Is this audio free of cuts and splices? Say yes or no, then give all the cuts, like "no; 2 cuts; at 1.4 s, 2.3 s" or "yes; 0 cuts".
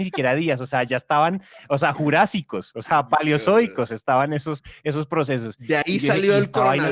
yes; 0 cuts